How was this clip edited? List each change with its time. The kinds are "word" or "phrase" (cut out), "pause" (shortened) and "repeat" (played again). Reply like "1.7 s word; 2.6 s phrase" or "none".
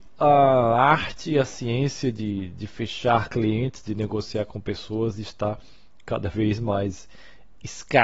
none